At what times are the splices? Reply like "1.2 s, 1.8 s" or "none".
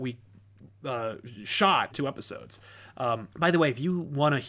1.9 s, 3.3 s